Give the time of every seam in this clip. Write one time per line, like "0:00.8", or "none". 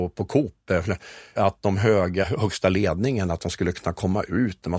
0:01.4
0:02.2